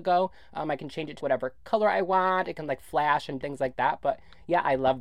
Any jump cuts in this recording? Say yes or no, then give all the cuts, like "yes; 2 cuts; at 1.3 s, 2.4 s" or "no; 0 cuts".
yes; 2 cuts; at 1.2 s, 3.4 s